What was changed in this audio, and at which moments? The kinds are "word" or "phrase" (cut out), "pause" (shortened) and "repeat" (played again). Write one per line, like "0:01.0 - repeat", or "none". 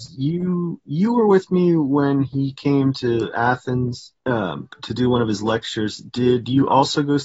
0:04.2 - pause